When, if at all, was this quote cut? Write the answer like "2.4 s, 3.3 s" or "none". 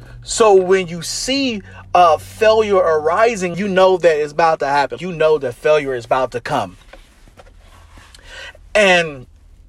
3.5 s, 5.0 s